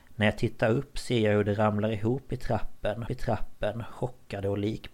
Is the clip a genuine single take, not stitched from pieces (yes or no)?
no